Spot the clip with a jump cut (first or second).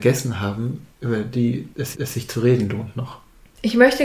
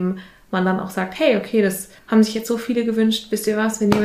first